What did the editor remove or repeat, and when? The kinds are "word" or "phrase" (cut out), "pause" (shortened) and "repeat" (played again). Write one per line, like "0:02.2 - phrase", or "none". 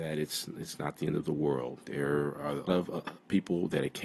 0:02.7 - word